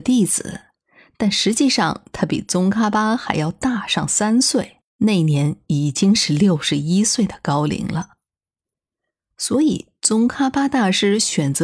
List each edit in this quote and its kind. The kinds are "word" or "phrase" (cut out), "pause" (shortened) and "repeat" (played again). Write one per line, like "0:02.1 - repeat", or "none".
0:04.9 - pause

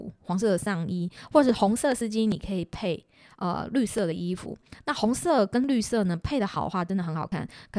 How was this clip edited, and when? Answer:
none

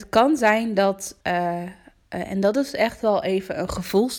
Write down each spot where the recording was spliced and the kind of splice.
0:01.2 - pause

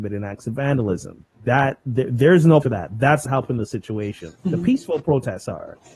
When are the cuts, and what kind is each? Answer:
0:01.3 - pause
0:02.6 - word
0:03.3 - word
0:04.4 - pause

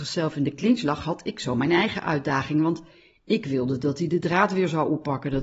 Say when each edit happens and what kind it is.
none

